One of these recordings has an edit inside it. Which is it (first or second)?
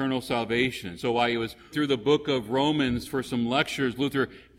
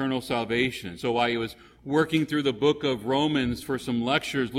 first